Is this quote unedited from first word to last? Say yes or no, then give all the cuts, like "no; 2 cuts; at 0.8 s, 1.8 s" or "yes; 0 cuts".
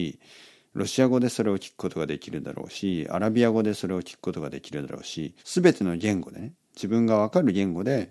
no; 1 cut; at 5.4 s